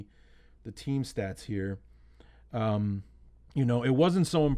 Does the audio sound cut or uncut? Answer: cut